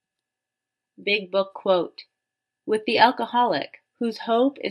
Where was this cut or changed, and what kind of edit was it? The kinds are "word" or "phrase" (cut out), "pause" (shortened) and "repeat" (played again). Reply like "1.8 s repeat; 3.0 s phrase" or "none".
none